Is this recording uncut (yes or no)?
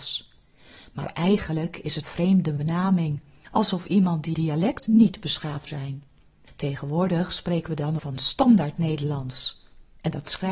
no